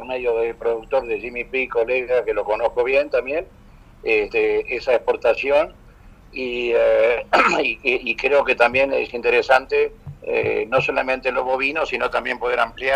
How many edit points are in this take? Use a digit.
0